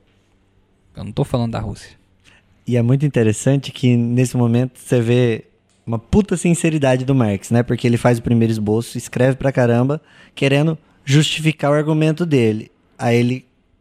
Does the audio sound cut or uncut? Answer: uncut